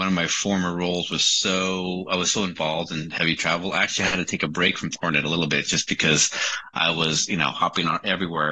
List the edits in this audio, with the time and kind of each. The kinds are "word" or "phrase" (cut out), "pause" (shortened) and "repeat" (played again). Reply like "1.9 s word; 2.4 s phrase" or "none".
none